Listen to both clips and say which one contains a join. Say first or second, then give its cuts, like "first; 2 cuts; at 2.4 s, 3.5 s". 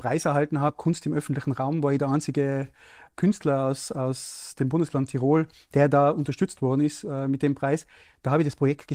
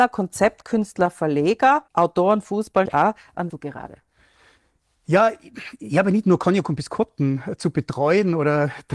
second; 3 cuts; at 1.9 s, 2.9 s, 3.5 s